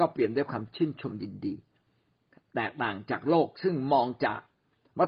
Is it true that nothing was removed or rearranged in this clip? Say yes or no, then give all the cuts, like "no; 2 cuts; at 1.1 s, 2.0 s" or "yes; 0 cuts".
yes; 0 cuts